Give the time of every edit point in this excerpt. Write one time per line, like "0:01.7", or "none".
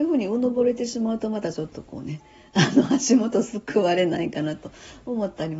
none